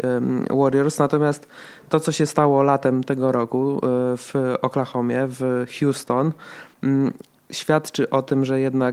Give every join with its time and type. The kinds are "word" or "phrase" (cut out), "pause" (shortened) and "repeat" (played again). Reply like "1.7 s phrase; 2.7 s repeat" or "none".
none